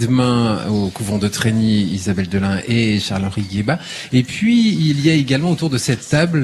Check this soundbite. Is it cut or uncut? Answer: uncut